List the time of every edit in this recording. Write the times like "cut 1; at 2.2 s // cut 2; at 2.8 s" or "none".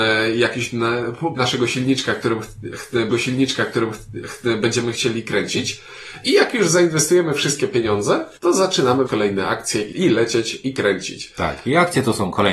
cut 1; at 1.4 s // cut 2; at 3.1 s // cut 3; at 8.4 s // cut 4; at 9.1 s // cut 5; at 9.9 s

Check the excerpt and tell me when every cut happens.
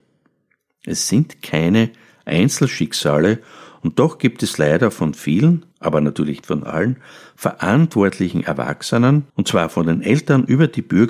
cut 1; at 5.7 s // cut 2; at 6.4 s // cut 3; at 9.3 s

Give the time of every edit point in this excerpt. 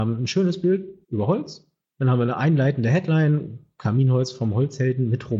cut 1; at 1.0 s // cut 2; at 1.9 s

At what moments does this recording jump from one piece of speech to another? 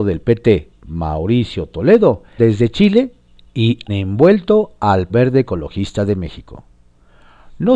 cut 1; at 2.4 s // cut 2; at 3.9 s // cut 3; at 5.1 s

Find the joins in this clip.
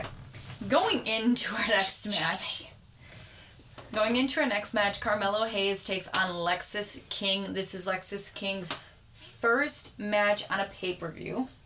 none

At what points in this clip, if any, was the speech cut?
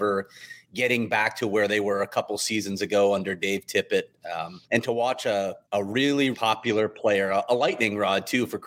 cut 1; at 4.6 s // cut 2; at 5.6 s // cut 3; at 6.3 s

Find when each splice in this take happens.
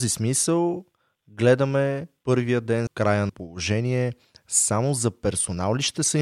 cut 1; at 2.9 s // cut 2; at 3.3 s

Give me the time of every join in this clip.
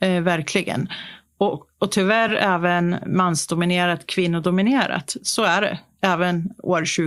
none

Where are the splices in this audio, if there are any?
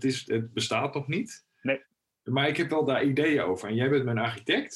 none

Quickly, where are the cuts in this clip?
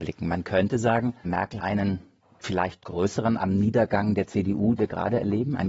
cut 1; at 1.2 s // cut 2; at 1.6 s // cut 3; at 2.8 s // cut 4; at 3.4 s // cut 5; at 4.8 s

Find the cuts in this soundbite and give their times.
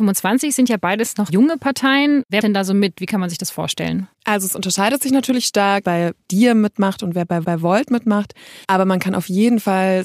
cut 1; at 1.3 s // cut 2; at 2.4 s // cut 3; at 4.1 s // cut 4; at 5.8 s // cut 5; at 7.4 s // cut 6; at 8.6 s

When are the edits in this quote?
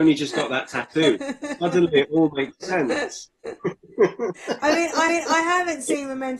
cut 1; at 5.1 s

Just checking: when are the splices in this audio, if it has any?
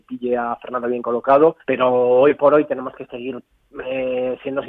cut 1; at 1.6 s

